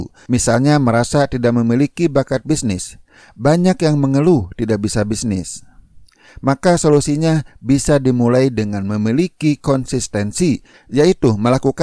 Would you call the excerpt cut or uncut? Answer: uncut